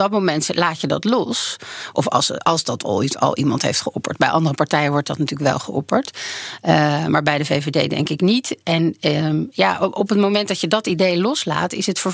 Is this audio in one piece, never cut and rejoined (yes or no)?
yes